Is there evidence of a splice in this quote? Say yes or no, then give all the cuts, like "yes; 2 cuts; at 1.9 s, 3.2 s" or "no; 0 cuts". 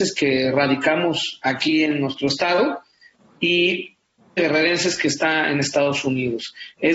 yes; 1 cut; at 4.4 s